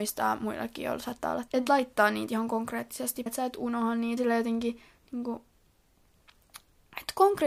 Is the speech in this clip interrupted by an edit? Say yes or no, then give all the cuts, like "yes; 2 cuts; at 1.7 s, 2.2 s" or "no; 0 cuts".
yes; 4 cuts; at 1.5 s, 2.3 s, 3.3 s, 4.2 s